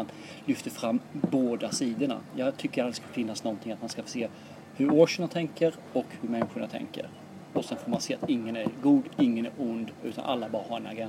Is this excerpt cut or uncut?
uncut